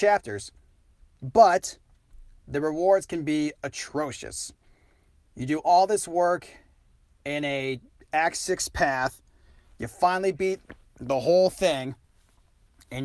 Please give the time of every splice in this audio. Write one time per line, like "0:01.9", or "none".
none